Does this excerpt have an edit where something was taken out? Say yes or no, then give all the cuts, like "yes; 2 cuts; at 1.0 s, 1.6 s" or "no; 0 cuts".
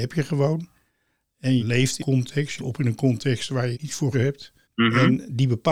yes; 6 cuts; at 1.6 s, 2.0 s, 2.6 s, 3.7 s, 4.1 s, 4.6 s